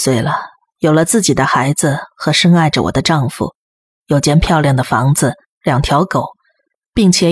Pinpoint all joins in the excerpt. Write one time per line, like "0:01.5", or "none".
none